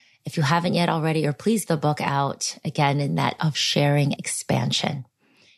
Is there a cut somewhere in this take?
yes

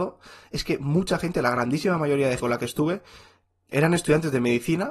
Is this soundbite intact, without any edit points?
no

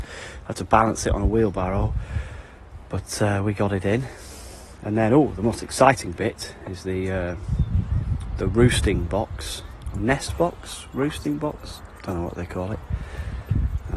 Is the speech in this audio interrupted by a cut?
no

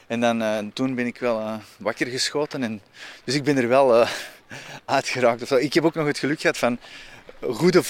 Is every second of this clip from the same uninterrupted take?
yes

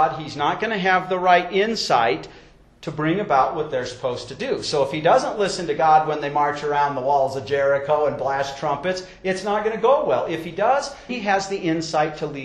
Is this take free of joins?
no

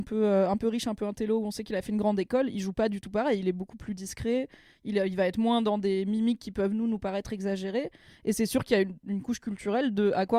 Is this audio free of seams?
yes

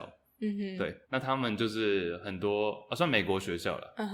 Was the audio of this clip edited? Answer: yes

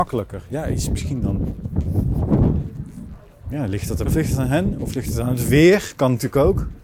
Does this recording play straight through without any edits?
no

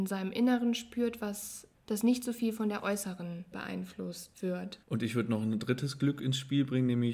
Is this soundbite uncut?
no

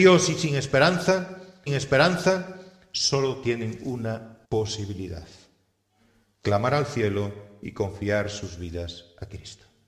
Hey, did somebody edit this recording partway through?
yes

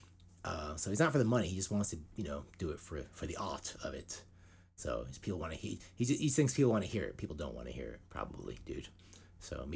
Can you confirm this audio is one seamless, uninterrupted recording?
yes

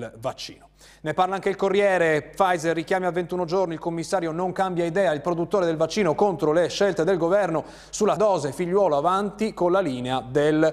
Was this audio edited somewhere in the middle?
yes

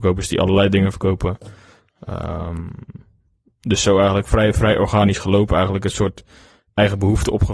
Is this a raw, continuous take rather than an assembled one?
yes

